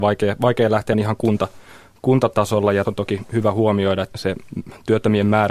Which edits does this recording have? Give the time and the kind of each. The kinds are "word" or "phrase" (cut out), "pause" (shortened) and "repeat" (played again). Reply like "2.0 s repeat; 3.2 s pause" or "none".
0.9 s word; 2.8 s word; 4.1 s word